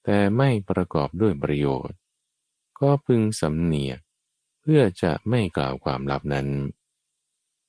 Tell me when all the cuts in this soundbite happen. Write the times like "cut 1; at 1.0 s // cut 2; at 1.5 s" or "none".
none